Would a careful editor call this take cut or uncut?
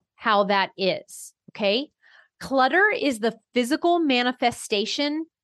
uncut